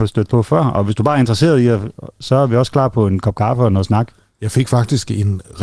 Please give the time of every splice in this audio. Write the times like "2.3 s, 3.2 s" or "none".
none

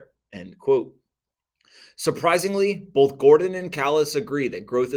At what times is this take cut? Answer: none

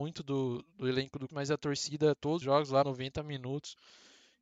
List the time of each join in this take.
1.3 s, 2.4 s, 2.8 s

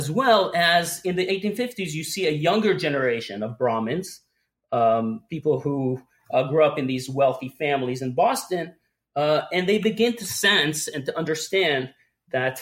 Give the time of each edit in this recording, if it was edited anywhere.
none

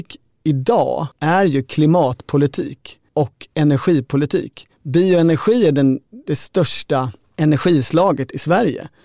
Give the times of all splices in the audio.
1.1 s, 3.1 s, 4.7 s

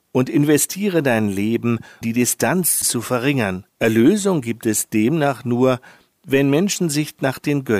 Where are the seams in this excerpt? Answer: 2.0 s, 2.8 s, 3.7 s

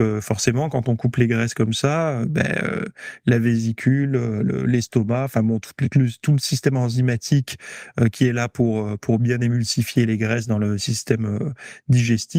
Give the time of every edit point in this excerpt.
5.9 s

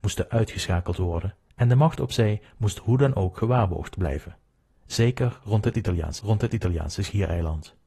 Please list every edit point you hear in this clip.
6.2 s

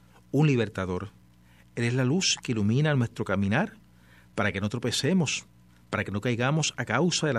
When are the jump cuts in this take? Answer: none

